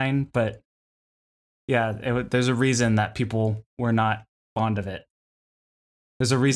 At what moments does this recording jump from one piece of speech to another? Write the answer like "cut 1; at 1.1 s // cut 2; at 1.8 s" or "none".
none